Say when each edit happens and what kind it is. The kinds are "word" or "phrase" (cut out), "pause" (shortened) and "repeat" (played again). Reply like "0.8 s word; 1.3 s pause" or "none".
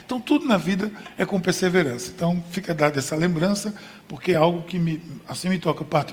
none